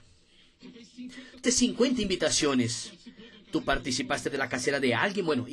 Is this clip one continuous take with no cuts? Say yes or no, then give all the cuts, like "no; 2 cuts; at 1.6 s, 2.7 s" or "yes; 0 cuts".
no; 1 cut; at 1.4 s